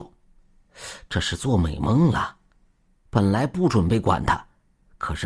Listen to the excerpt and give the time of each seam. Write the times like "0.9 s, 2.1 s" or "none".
none